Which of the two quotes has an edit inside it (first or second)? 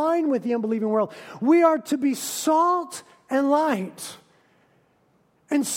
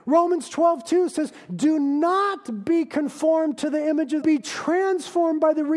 second